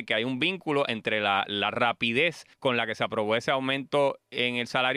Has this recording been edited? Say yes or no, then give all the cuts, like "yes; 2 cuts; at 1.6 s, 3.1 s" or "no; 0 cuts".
yes; 2 cuts; at 1.5 s, 2.5 s